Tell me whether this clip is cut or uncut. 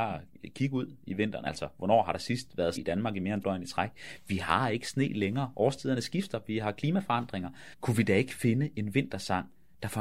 cut